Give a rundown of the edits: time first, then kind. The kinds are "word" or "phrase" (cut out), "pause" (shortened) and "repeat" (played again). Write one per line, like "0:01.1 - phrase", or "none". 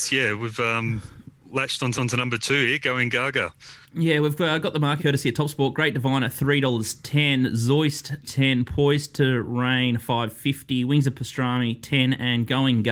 0:01.4 - pause
0:01.9 - repeat
0:03.8 - pause
0:05.0 - word
0:08.2 - word